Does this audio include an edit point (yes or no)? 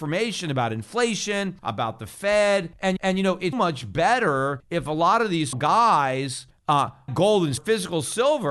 yes